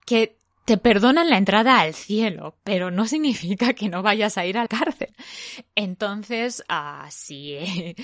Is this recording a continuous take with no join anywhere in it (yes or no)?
no